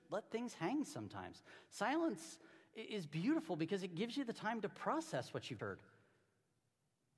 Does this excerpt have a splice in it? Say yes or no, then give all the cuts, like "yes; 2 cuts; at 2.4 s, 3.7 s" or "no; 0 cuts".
yes; 1 cut; at 5.6 s